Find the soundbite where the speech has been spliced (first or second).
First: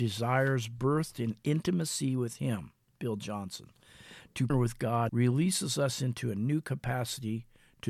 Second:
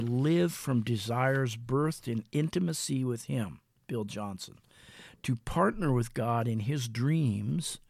first